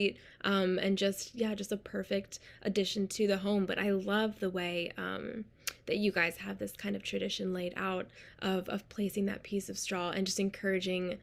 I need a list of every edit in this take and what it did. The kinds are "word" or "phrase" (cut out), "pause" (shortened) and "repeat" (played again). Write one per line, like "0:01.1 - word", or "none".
none